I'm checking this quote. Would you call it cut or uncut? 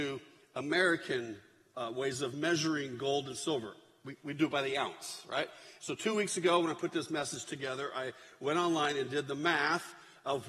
uncut